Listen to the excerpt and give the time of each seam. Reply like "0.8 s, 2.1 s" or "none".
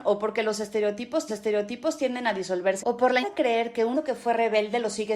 1.3 s, 2.8 s, 3.2 s, 3.9 s